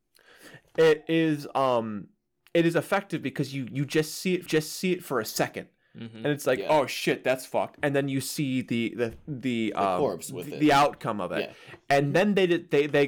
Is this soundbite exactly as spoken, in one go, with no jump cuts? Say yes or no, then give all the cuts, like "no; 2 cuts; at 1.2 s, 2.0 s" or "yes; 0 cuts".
no; 1 cut; at 4.5 s